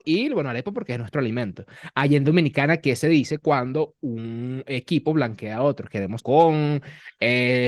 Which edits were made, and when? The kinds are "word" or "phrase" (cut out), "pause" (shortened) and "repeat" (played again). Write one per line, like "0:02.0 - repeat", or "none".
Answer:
0:06.2 - phrase